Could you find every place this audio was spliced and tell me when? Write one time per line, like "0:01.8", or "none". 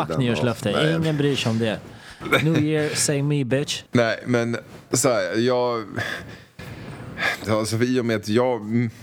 0:03.9
0:07.4